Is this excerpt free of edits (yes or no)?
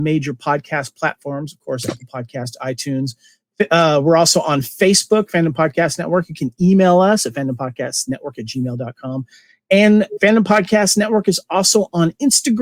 yes